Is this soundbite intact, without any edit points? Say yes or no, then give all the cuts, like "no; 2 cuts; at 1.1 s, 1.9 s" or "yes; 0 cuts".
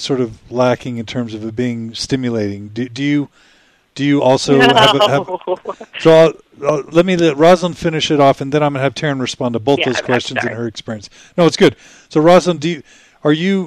yes; 0 cuts